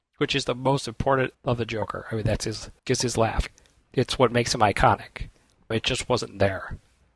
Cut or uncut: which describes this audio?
cut